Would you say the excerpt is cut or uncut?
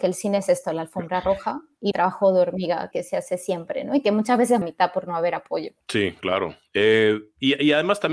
cut